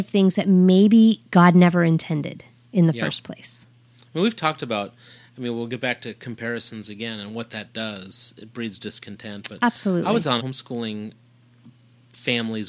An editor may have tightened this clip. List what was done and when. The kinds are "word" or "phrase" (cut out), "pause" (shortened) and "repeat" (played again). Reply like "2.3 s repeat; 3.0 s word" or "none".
10.4 s word

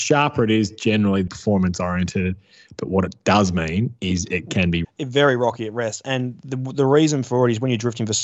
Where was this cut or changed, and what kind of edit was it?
1.3 s word; 4.8 s phrase

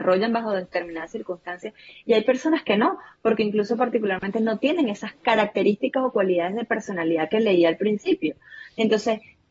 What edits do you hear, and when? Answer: none

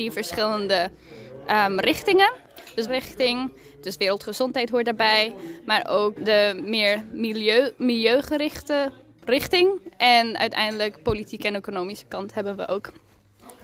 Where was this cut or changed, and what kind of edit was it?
2.9 s phrase; 6.2 s word

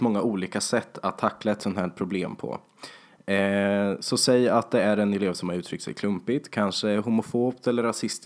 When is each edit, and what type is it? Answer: none

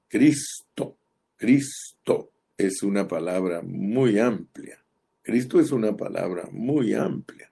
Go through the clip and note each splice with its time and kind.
none

